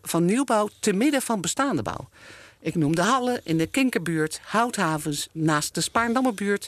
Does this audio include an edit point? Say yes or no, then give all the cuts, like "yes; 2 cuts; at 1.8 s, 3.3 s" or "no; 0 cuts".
no; 0 cuts